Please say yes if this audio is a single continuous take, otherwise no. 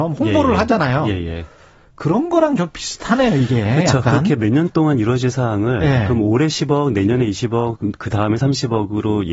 yes